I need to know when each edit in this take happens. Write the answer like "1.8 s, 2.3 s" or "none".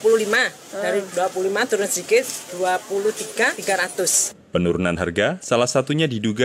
4.4 s